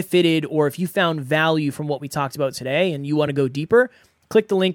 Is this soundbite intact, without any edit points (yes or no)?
yes